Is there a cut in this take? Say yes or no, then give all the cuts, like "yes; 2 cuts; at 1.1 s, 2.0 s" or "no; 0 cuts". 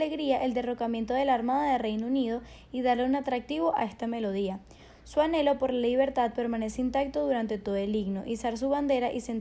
no; 0 cuts